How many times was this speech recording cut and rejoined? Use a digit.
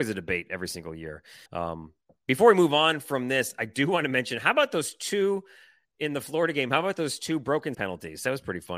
2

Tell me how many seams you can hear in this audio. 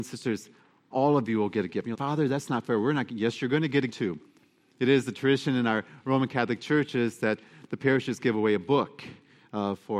3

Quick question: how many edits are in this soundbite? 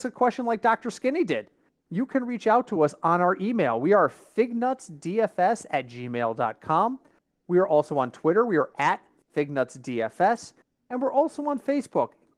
0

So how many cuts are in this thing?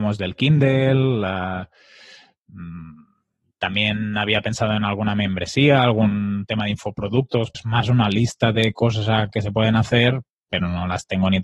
1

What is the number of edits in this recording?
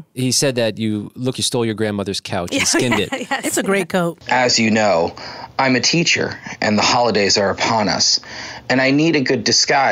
1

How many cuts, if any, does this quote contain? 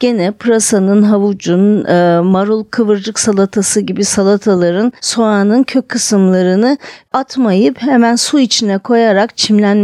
1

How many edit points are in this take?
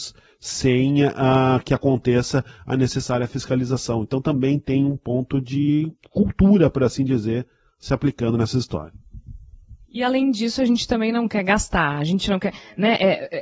0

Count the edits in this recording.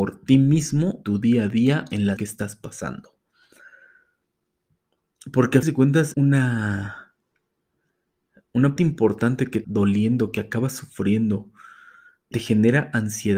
7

